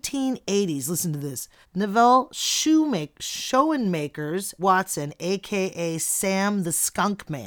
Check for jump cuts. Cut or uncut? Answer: cut